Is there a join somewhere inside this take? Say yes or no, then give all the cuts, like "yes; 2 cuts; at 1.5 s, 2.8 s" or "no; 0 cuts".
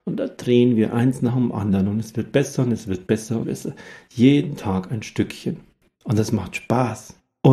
yes; 1 cut; at 3.4 s